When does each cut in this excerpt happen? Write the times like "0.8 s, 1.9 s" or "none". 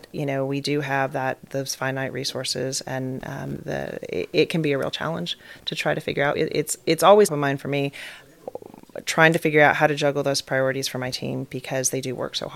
1.5 s, 3.6 s, 6.3 s, 7.3 s